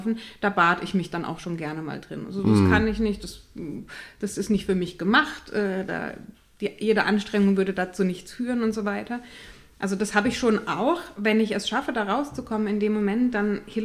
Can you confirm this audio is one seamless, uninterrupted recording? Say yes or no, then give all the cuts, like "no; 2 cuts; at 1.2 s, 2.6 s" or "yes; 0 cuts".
yes; 0 cuts